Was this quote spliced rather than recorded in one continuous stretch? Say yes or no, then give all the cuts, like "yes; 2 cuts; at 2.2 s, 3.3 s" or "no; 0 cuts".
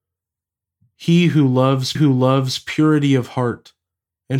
yes; 1 cut; at 1.9 s